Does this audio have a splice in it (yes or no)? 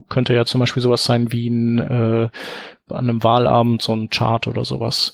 no